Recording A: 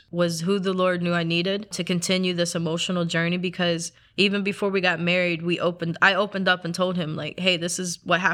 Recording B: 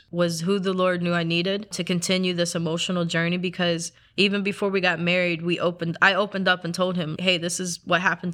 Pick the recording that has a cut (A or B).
B